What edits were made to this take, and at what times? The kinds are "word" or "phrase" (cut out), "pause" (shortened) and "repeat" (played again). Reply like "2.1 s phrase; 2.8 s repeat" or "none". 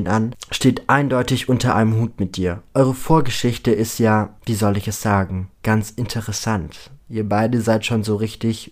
4.4 s pause; 5.5 s pause